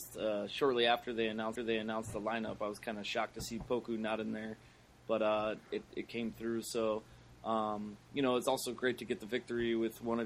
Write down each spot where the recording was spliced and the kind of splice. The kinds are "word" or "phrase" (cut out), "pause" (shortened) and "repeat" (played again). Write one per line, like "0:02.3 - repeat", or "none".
0:01.6 - repeat